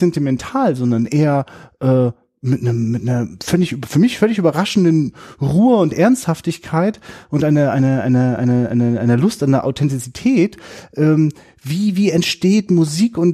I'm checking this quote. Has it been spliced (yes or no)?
no